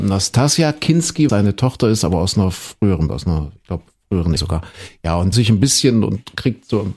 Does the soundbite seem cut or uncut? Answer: cut